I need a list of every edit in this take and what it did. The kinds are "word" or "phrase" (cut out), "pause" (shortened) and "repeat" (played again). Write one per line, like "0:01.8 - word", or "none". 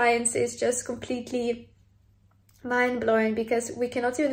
none